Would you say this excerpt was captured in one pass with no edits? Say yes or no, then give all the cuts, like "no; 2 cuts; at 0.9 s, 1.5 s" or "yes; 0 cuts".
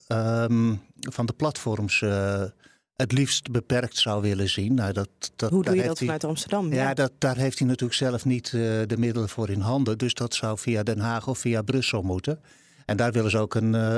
yes; 0 cuts